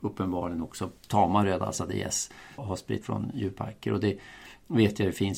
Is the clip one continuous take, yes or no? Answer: no